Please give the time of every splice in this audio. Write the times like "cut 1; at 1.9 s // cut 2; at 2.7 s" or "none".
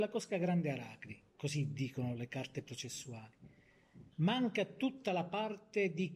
cut 1; at 1.3 s // cut 2; at 4.1 s